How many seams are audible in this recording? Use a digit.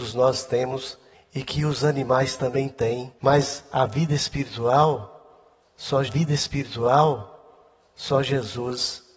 3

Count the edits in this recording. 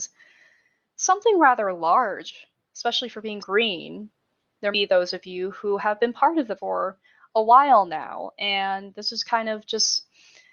3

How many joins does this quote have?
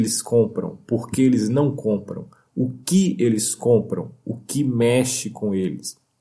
0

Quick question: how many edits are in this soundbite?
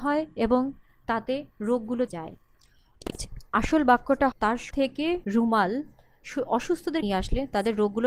7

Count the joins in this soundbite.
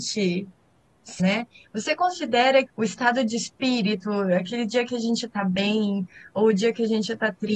2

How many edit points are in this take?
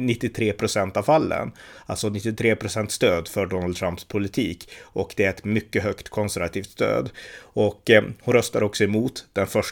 0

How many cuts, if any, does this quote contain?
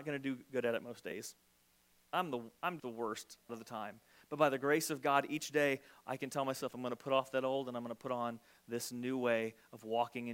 2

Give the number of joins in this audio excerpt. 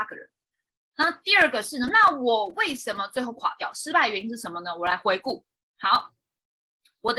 1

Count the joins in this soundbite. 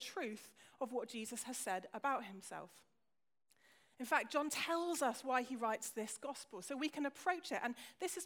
0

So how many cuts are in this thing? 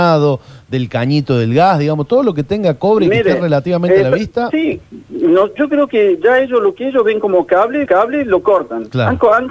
1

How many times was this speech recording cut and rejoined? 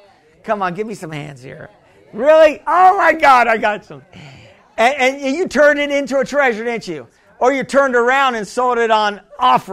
0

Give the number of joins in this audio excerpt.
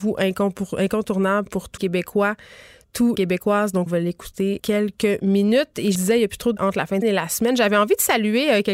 8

